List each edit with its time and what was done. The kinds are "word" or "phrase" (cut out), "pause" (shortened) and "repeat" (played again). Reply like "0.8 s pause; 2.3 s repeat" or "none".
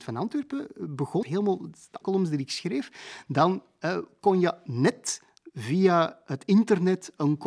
1.2 s phrase; 2.0 s word